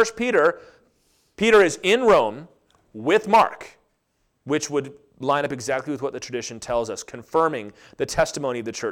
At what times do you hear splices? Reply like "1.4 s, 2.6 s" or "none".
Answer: none

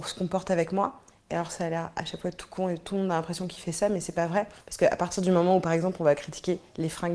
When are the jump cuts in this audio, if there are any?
4.6 s

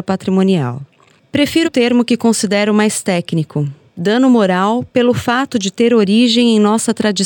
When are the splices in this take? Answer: 1.6 s

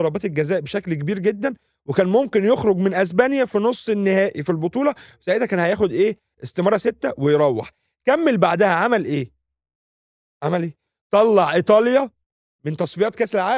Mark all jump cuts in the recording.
none

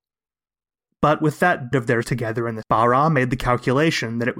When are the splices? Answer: 1.7 s, 2.0 s, 2.6 s

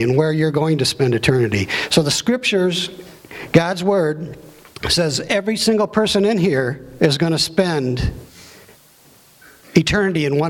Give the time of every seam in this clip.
none

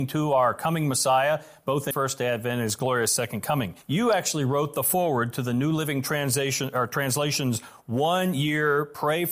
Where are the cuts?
1.9 s, 3.8 s

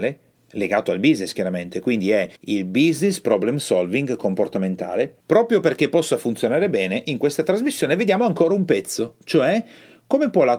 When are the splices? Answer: 2.4 s, 5.2 s

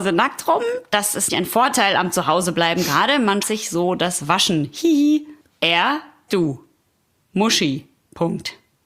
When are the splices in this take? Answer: 1.3 s, 3.4 s, 6.3 s

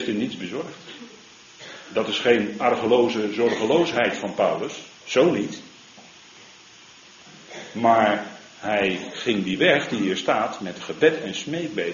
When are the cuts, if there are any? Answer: 4.9 s, 8.5 s

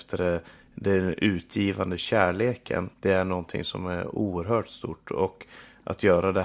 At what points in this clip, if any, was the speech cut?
2.9 s

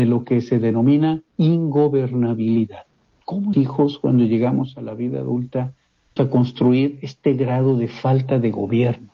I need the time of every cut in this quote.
1.3 s, 3.5 s, 6.2 s

